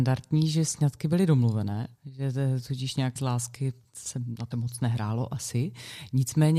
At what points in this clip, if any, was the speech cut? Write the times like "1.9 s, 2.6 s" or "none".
1.9 s, 3.2 s, 4.5 s

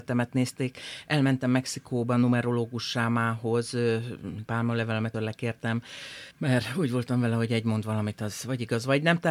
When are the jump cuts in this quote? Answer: 4.5 s, 5.1 s, 6.3 s

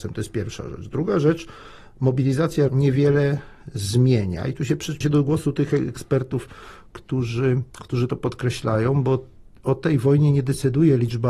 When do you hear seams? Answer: 2.7 s, 5.0 s, 7.7 s

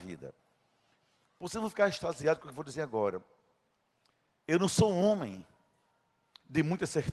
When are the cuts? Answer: none

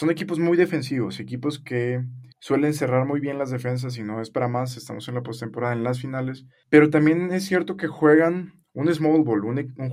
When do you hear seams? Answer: 2.3 s

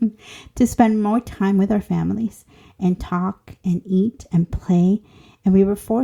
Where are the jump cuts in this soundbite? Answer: none

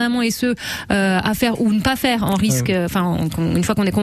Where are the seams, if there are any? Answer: none

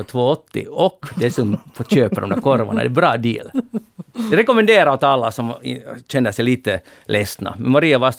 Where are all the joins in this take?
none

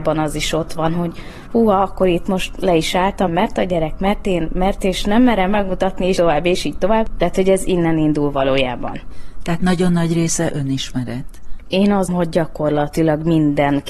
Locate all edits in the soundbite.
3.3 s, 6.2 s, 12.1 s

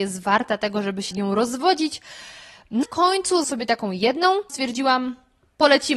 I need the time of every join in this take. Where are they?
1.1 s, 2.8 s, 3.4 s, 4.5 s

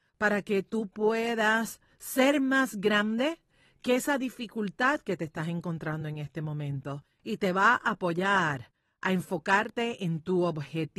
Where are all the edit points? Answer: none

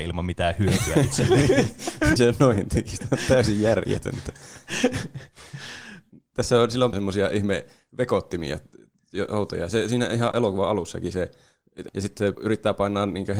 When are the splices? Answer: 2.2 s, 6.9 s, 10.3 s, 11.9 s, 12.3 s

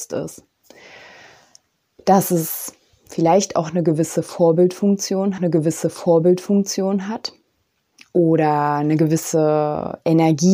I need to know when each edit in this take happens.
5.4 s

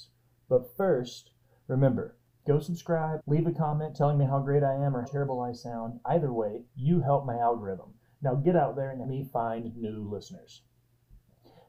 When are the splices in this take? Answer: 3.2 s, 5.0 s, 9.0 s

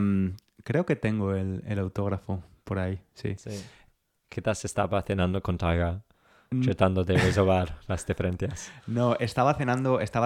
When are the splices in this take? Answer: none

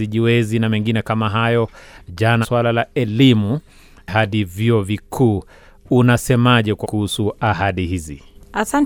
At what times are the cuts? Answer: 2.4 s, 6.8 s

